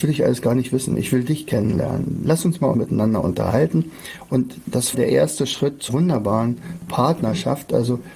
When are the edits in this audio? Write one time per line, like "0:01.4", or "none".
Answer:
0:02.7
0:04.9
0:05.9